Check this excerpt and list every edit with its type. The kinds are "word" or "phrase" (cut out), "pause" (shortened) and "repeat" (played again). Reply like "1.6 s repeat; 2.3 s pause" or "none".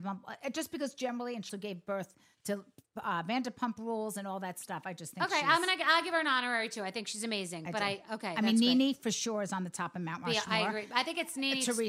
1.5 s word